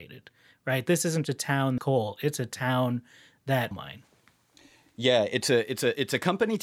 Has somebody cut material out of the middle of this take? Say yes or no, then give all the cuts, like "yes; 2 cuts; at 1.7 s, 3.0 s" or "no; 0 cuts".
yes; 3 cuts; at 1.2 s, 1.8 s, 3.7 s